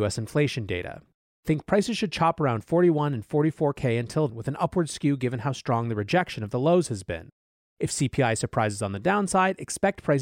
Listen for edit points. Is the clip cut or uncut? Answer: cut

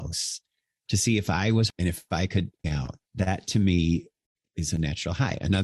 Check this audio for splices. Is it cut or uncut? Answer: cut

